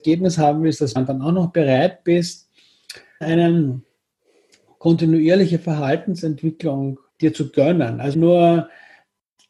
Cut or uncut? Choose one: cut